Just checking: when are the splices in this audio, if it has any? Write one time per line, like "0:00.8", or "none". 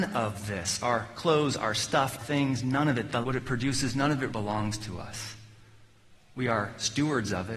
0:02.2
0:03.2
0:04.3